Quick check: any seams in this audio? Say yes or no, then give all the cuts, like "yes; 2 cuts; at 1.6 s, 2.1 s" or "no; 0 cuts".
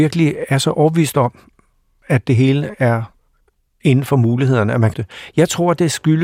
yes; 1 cut; at 4.9 s